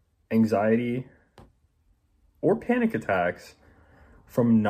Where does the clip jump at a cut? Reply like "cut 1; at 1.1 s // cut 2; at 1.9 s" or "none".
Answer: none